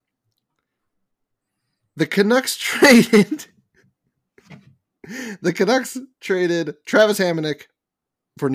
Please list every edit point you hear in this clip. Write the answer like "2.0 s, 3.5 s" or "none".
none